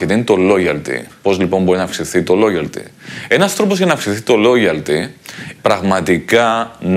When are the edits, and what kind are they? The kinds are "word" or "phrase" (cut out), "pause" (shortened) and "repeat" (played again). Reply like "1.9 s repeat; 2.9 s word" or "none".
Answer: 5.6 s word